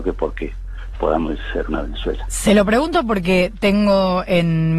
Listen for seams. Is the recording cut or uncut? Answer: uncut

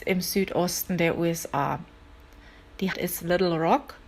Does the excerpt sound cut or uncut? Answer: cut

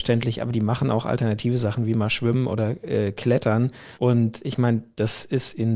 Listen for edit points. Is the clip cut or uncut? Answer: cut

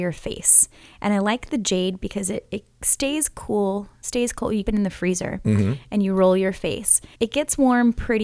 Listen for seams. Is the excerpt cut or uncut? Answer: cut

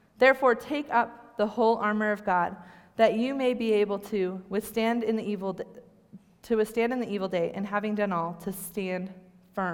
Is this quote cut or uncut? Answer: uncut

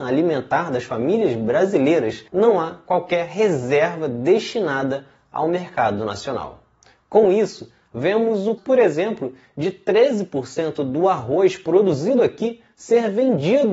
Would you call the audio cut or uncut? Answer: cut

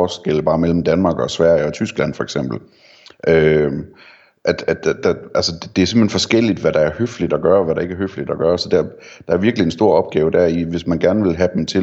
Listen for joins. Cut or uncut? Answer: uncut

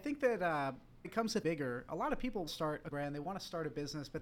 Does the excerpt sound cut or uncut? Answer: cut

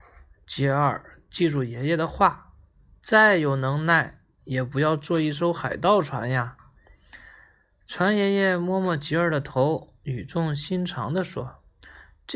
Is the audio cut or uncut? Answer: uncut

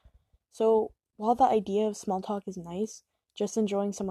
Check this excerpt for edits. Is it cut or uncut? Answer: uncut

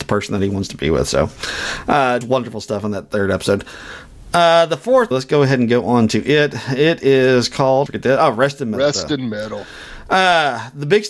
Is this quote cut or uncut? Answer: cut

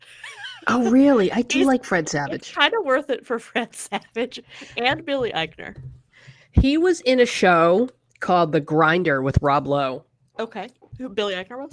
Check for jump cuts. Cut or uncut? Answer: uncut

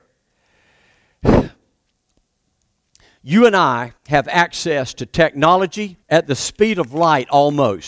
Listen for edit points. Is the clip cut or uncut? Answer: cut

